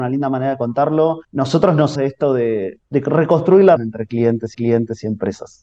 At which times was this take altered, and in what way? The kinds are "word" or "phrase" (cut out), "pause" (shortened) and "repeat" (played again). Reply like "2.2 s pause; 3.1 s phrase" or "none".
1.2 s pause; 2.0 s word; 2.8 s word; 3.8 s word; 4.5 s repeat